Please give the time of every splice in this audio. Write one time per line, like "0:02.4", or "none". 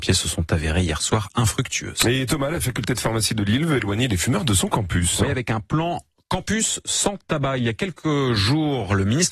none

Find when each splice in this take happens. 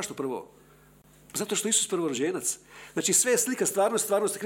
none

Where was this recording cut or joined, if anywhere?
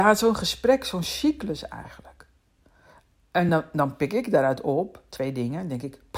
none

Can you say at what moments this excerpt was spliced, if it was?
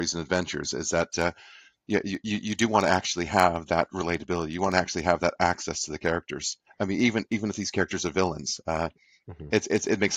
0:06.7

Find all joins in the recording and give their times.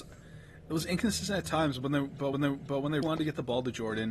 0:02.3
0:03.0

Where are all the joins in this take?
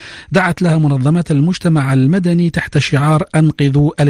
none

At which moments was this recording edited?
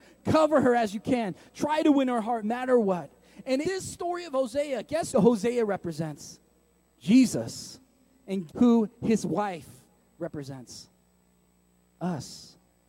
0:02.4
0:03.6
0:05.1
0:08.5

